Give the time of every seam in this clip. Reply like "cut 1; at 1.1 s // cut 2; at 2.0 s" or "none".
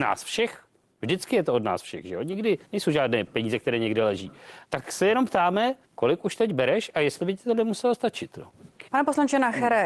cut 1; at 2.6 s // cut 2; at 4.6 s // cut 3; at 5.8 s // cut 4; at 8.9 s